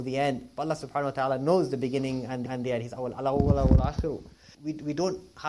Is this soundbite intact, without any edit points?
no; 2 cuts; at 2.5 s, 4.5 s

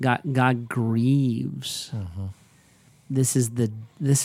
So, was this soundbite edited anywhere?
no; 0 cuts

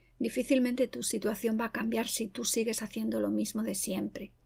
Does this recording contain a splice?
no; 0 cuts

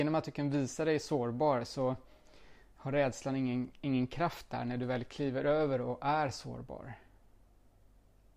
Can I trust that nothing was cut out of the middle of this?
yes; 0 cuts

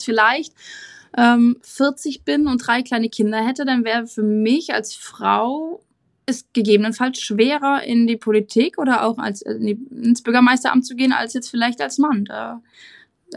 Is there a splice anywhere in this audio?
no; 0 cuts

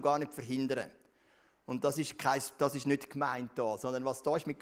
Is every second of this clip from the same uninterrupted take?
yes; 0 cuts

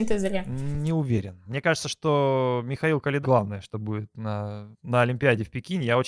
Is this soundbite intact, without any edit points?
no; 2 cuts; at 3.2 s, 4.7 s

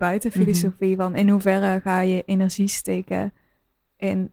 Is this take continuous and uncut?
yes; 0 cuts

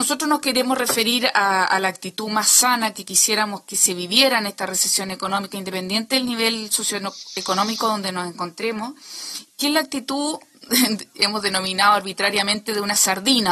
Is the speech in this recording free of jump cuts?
yes; 0 cuts

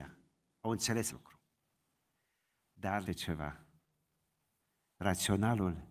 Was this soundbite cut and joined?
yes; 2 cuts; at 1.1 s, 3.1 s

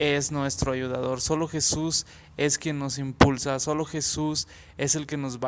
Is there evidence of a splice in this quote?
no; 0 cuts

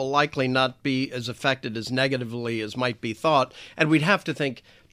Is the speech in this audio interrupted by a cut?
no; 0 cuts

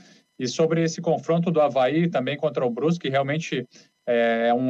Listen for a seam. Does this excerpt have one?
no; 0 cuts

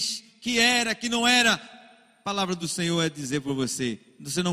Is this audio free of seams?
yes; 0 cuts

